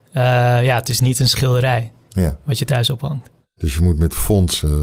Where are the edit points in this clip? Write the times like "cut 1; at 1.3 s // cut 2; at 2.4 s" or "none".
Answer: none